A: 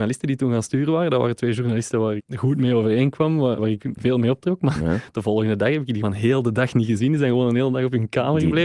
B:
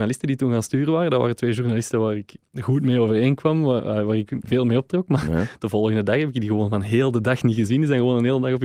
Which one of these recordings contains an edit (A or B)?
A